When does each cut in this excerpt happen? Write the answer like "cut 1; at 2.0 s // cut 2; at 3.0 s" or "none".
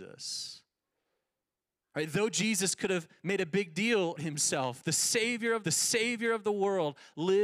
cut 1; at 4.2 s // cut 2; at 5.6 s